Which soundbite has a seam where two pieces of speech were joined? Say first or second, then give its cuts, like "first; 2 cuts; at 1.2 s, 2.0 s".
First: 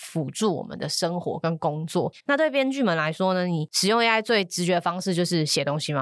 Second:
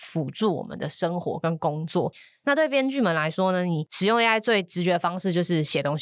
first; 1 cut; at 2.2 s